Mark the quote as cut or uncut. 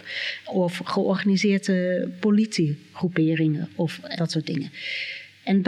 cut